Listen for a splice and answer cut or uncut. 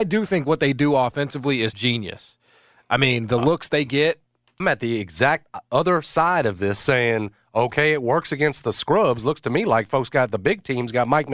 cut